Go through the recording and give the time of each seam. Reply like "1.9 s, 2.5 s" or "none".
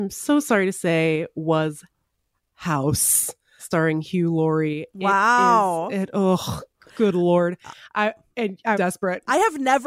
8.7 s